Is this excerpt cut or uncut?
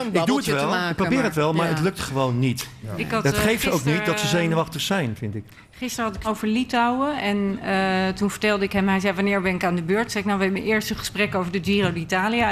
cut